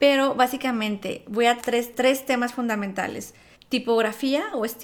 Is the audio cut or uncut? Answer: cut